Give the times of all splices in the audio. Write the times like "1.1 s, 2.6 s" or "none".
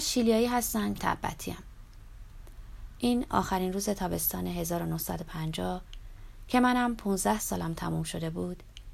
1.0 s